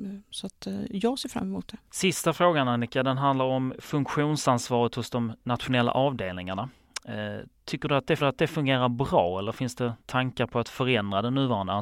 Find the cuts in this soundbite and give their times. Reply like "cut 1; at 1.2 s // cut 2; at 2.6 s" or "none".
cut 1; at 1.8 s // cut 2; at 8.2 s // cut 3; at 10.0 s

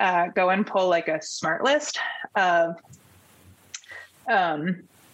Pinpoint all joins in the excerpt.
none

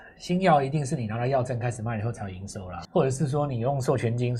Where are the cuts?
cut 1; at 2.8 s

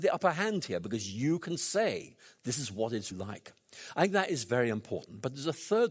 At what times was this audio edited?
cut 1; at 3.1 s

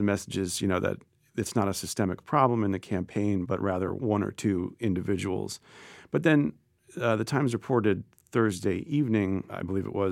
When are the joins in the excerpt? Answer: none

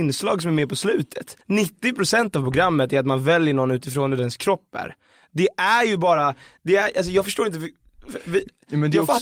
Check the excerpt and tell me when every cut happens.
cut 1; at 1.4 s

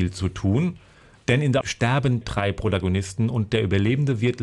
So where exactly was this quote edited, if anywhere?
cut 1; at 1.6 s // cut 2; at 2.2 s

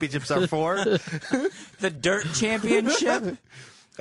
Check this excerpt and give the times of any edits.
none

